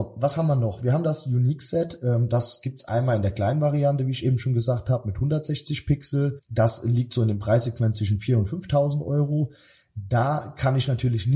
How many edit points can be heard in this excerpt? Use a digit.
0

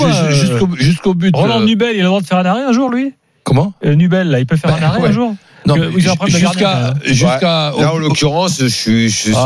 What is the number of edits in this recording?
0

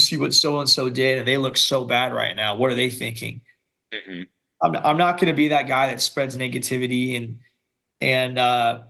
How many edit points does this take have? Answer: 0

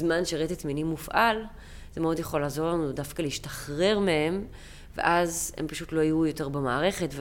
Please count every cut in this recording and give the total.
0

